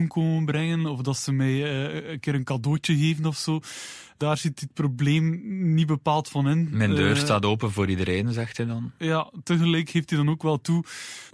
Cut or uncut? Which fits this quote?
uncut